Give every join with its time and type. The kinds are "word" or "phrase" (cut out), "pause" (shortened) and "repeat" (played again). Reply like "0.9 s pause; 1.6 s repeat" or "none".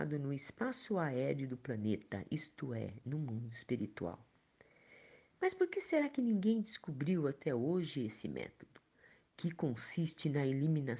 none